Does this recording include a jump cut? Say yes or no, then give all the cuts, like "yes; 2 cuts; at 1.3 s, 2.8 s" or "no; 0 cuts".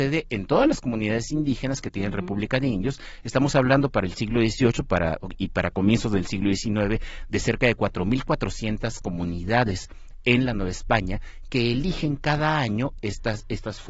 no; 0 cuts